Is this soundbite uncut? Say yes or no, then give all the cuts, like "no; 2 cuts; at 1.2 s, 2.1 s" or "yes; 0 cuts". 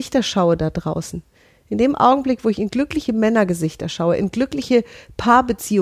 no; 1 cut; at 3.1 s